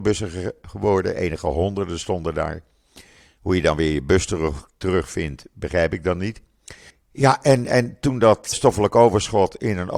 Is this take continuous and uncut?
no; 2 cuts; at 6.9 s, 8.5 s

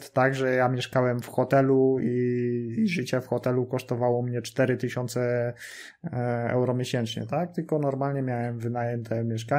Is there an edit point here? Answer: no; 0 cuts

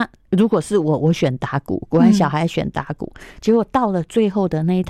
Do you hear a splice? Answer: no; 0 cuts

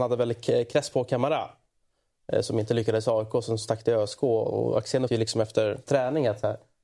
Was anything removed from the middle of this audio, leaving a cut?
yes; 3 cuts; at 3.6 s, 5.1 s, 5.9 s

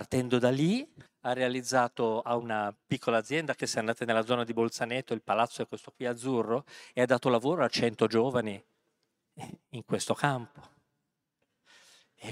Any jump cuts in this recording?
yes; 3 cuts; at 1.1 s, 2.8 s, 3.6 s

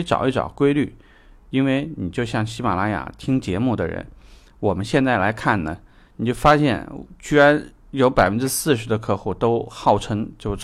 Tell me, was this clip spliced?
no; 0 cuts

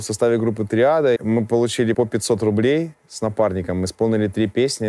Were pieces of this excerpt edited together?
yes; 2 cuts; at 1.2 s, 1.9 s

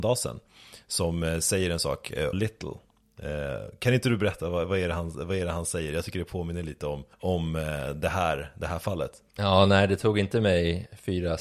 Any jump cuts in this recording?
yes; 3 cuts; at 2.3 s, 7.1 s, 9.3 s

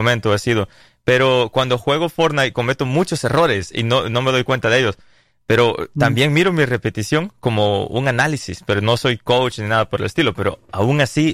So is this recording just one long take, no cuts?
yes; 0 cuts

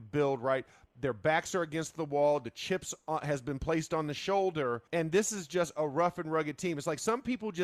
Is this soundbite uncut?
no; 1 cut; at 4.9 s

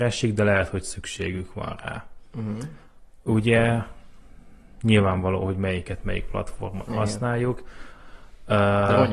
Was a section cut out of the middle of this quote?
no; 0 cuts

